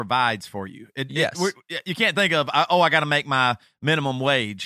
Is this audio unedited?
yes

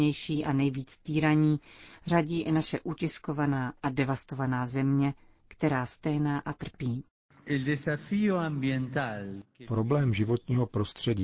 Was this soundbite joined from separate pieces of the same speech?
no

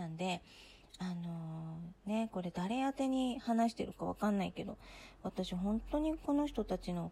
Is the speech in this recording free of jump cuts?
yes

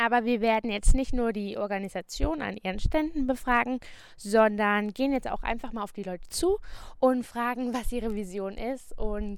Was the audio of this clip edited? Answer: no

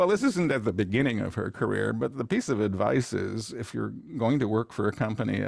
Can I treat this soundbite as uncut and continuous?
yes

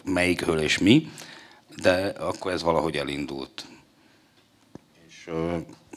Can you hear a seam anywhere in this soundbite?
no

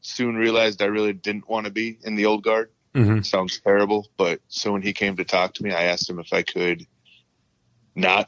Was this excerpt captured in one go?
yes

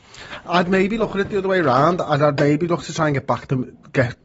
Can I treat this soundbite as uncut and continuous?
yes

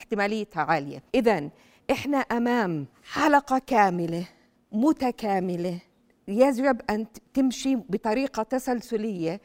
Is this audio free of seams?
no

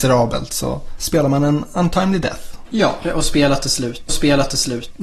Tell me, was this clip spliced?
yes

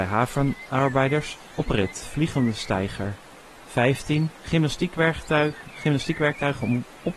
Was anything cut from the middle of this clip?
no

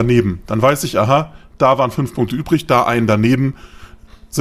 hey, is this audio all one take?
yes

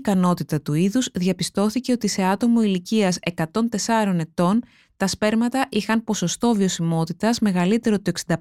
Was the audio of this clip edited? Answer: no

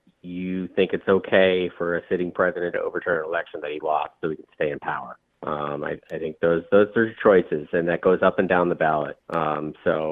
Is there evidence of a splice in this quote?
yes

